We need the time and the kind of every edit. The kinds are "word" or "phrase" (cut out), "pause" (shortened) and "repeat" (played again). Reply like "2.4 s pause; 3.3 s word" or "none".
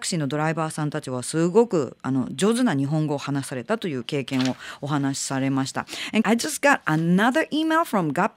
6.2 s word